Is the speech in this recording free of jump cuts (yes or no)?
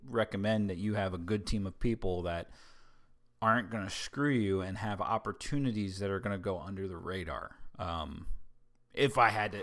yes